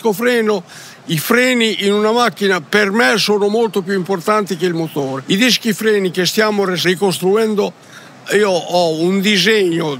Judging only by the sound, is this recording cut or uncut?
cut